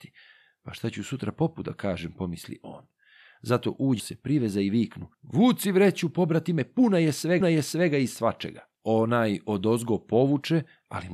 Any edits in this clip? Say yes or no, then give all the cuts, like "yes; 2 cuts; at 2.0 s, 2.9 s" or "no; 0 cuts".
yes; 3 cuts; at 4.0 s, 5.1 s, 7.4 s